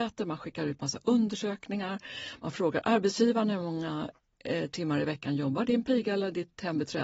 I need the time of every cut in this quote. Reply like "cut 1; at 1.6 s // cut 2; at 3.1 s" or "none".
none